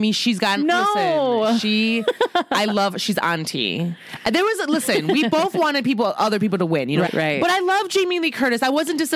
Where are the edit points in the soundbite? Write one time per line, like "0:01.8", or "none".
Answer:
0:07.1